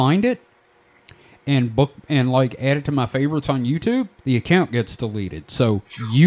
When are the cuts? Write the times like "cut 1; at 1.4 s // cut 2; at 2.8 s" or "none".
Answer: cut 1; at 4.2 s